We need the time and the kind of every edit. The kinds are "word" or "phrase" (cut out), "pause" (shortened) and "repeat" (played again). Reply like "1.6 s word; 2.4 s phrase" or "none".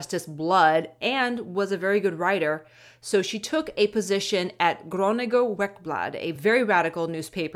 none